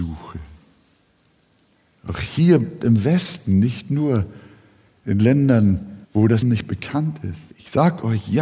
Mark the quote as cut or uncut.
cut